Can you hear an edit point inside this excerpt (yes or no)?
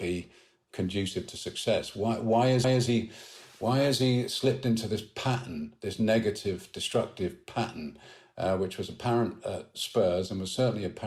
yes